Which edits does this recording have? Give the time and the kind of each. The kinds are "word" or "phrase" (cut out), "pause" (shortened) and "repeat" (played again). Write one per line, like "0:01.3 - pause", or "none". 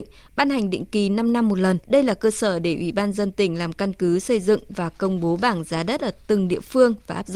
0:01.8 - pause